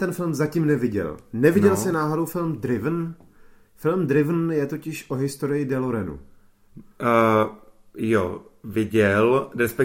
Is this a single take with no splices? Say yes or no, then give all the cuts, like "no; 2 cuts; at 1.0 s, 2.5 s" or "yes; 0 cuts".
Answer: yes; 0 cuts